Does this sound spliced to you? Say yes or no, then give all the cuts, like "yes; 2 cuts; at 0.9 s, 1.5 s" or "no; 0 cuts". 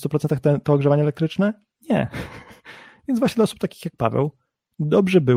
yes; 1 cut; at 1.8 s